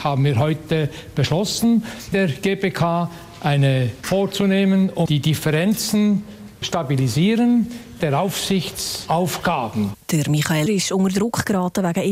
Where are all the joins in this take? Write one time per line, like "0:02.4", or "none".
0:02.1
0:04.0
0:05.1
0:06.6
0:08.0
0:10.7